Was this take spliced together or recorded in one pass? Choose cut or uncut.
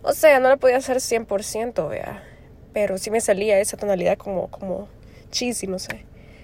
uncut